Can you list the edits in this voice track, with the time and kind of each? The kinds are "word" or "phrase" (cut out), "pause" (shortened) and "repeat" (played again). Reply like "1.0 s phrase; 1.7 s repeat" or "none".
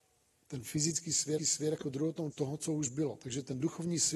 1.4 s repeat; 2.3 s phrase

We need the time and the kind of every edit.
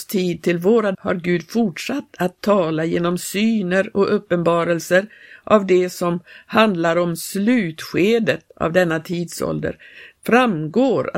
0.9 s word

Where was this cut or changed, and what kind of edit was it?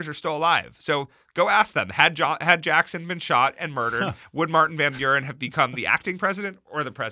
none

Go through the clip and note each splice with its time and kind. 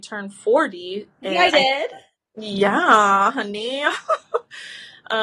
1.5 s word; 2.1 s pause

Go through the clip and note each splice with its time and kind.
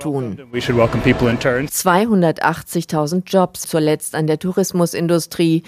3.6 s word

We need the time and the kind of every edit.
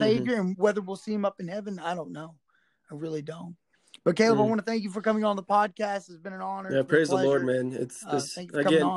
none

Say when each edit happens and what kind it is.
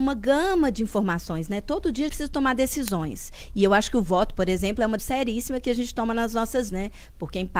2.1 s word; 5.0 s word; 6.7 s word

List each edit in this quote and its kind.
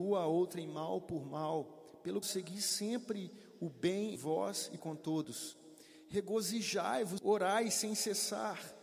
2.2 s word; 4.2 s word; 4.8 s word; 7.2 s word

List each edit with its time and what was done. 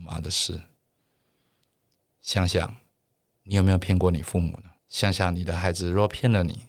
4.8 s pause

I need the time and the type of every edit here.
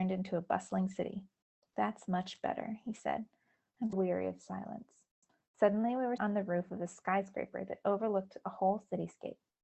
3.9 s word; 6.2 s word

